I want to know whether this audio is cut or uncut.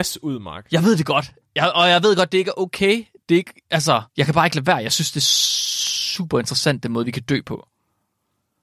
cut